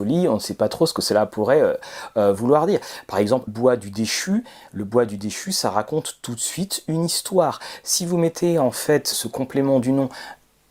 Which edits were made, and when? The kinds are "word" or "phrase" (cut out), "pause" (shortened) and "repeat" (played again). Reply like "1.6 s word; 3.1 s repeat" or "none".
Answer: 3.5 s word; 9.1 s word